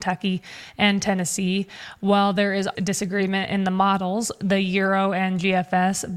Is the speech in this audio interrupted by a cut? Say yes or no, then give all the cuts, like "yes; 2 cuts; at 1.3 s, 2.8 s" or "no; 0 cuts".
yes; 1 cut; at 2.7 s